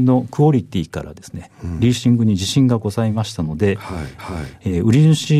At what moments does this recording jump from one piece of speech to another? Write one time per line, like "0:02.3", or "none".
0:04.2